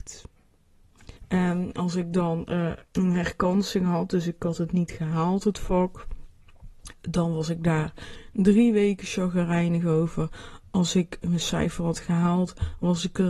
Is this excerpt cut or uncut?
cut